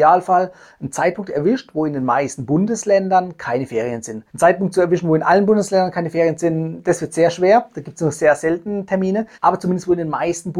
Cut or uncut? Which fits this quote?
cut